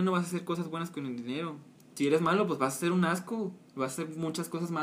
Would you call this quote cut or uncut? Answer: uncut